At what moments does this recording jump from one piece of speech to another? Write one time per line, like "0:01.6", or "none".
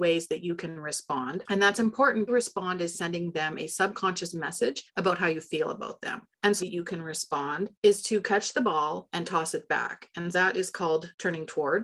0:02.3
0:04.9
0:06.6
0:10.3